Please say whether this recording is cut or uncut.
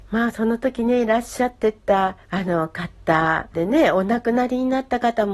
cut